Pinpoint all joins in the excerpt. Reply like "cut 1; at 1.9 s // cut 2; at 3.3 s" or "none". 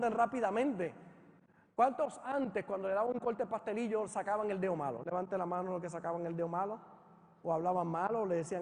none

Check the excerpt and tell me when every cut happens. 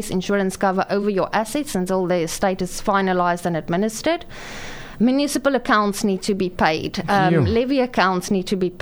none

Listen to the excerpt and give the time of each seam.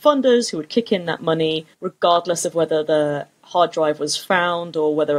cut 1; at 1.7 s

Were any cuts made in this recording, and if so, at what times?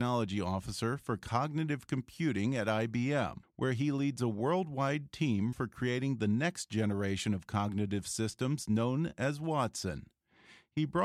cut 1; at 3.4 s // cut 2; at 5.5 s

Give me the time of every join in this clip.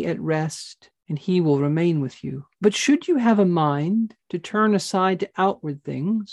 cut 1; at 1.0 s // cut 2; at 2.5 s // cut 3; at 4.2 s

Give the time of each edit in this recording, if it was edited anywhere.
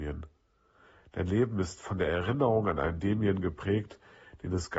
none

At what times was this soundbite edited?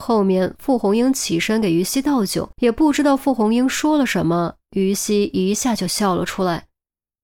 cut 1; at 2.5 s

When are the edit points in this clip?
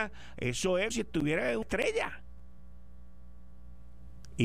cut 1; at 0.9 s // cut 2; at 1.6 s

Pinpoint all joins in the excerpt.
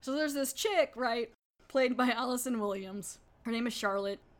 none

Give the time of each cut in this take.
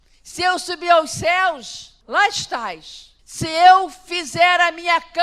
cut 1; at 2.0 s // cut 2; at 3.2 s

